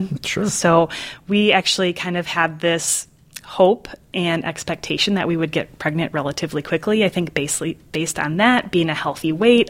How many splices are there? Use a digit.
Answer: 1